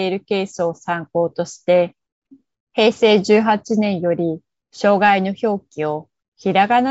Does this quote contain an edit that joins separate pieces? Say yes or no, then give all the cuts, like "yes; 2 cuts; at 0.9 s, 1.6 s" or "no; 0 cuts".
no; 0 cuts